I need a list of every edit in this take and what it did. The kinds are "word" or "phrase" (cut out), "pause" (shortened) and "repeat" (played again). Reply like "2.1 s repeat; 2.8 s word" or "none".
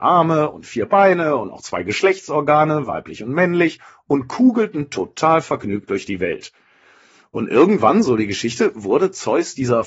none